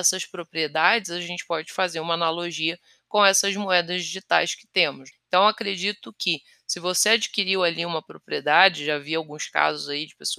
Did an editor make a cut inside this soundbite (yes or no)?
no